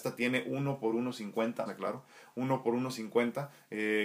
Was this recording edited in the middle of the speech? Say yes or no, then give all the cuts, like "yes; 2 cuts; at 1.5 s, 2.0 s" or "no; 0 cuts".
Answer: yes; 1 cut; at 1.7 s